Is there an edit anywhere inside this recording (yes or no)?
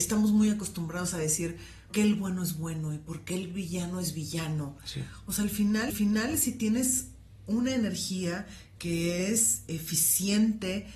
yes